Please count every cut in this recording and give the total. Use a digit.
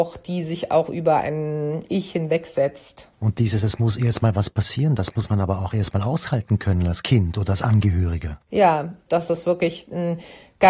1